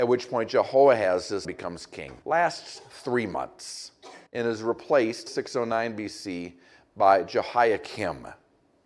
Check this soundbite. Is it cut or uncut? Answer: cut